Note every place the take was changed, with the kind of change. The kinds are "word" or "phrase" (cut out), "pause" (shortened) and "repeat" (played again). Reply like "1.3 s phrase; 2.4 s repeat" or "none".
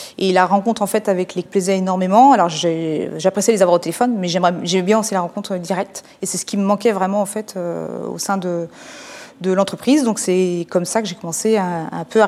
1.5 s phrase